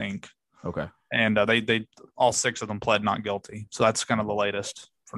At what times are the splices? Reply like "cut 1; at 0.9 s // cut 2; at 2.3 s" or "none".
none